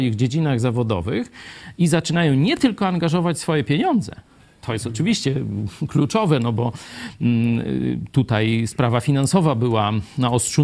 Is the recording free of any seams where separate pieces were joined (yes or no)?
yes